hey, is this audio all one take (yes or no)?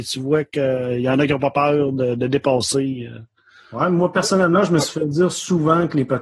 yes